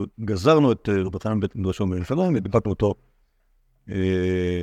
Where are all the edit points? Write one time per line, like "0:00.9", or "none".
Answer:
none